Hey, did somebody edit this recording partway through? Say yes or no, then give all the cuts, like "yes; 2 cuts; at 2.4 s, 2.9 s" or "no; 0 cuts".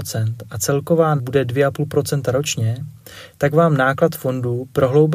yes; 1 cut; at 1.2 s